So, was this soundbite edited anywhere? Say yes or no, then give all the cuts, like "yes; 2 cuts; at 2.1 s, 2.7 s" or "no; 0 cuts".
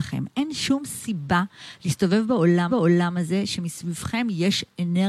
yes; 1 cut; at 2.7 s